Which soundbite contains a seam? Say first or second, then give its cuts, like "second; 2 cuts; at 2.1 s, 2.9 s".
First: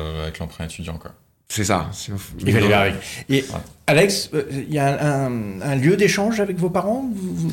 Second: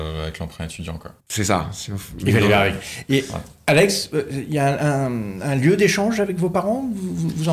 second; 1 cut; at 1.2 s